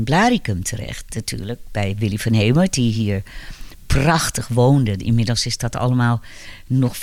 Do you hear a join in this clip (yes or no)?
no